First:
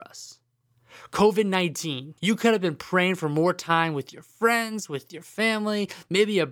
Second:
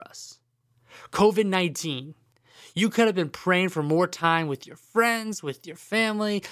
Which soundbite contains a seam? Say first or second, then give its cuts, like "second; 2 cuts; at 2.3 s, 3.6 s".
first; 1 cut; at 2.2 s